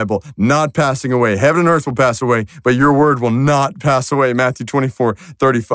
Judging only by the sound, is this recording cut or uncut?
uncut